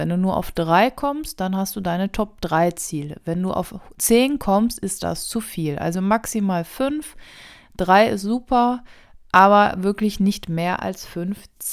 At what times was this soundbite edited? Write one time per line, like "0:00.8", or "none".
none

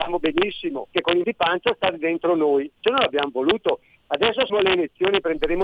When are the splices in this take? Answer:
0:00.9
0:01.2
0:02.8
0:04.5

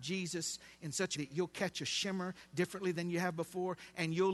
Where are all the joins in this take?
0:01.2

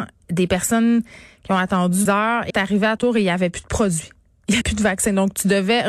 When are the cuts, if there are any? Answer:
0:02.1
0:02.5
0:03.0
0:04.6

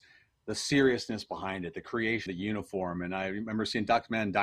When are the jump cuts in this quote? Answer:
0:02.3

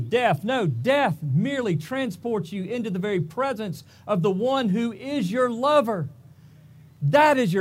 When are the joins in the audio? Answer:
none

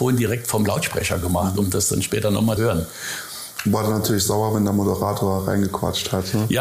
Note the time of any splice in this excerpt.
0:02.6

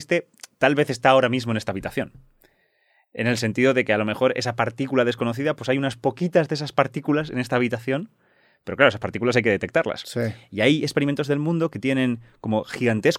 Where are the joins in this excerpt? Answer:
none

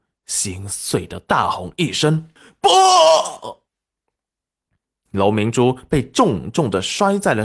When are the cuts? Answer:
0:02.4
0:03.7

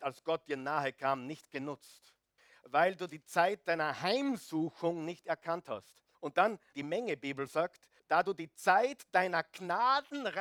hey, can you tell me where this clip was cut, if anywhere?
0:02.4
0:06.1
0:06.7
0:08.0

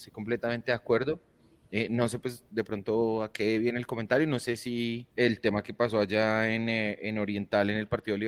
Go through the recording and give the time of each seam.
0:05.1

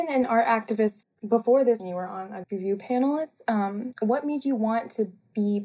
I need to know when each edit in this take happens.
0:01.0
0:01.8
0:02.4
0:03.9

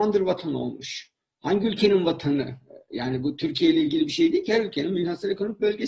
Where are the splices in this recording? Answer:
none

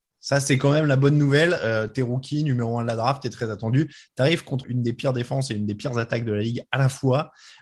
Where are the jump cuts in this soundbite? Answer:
0:04.6

